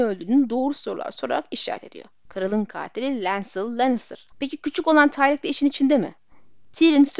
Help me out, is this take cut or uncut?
cut